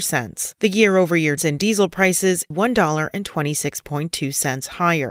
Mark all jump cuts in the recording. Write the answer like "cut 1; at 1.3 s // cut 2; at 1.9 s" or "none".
cut 1; at 1.4 s // cut 2; at 2.5 s